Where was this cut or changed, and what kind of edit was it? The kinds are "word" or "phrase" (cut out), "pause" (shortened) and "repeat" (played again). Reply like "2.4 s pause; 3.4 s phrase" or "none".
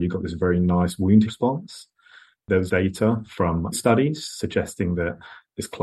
1.3 s word; 2.7 s word; 3.7 s word